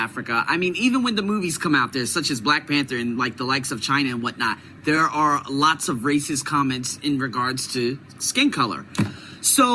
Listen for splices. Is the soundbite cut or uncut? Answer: uncut